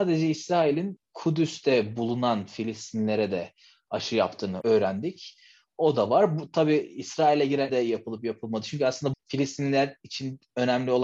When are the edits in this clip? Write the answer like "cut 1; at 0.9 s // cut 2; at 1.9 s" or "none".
cut 1; at 7.7 s // cut 2; at 9.1 s